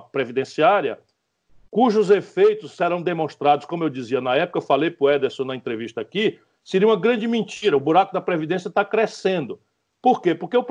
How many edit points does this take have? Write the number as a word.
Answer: zero